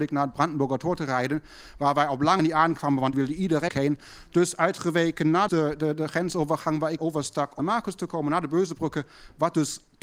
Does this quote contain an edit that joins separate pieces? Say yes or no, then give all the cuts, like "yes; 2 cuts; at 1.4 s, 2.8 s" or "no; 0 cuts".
yes; 6 cuts; at 2.4 s, 3.1 s, 3.7 s, 5.5 s, 7.0 s, 7.6 s